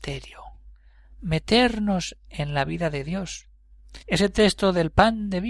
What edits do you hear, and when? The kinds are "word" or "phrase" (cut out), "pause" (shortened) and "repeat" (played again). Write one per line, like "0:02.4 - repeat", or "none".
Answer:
0:04.0 - pause